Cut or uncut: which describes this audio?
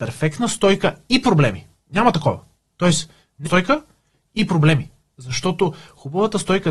cut